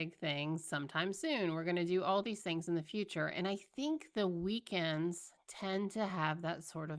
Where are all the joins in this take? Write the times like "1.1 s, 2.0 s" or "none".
none

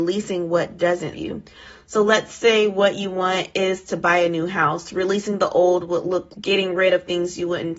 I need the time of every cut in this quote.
1.1 s, 6.3 s

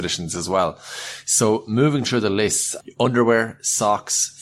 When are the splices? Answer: none

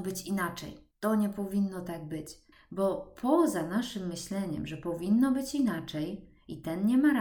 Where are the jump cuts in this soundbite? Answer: 0.9 s, 2.5 s

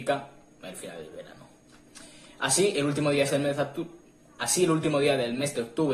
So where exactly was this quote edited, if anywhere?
none

